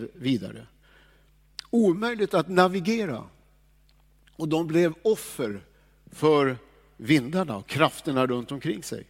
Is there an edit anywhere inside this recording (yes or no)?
no